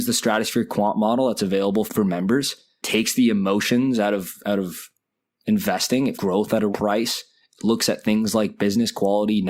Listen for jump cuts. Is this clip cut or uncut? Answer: cut